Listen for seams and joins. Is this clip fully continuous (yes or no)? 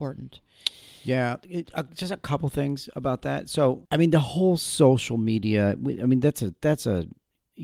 no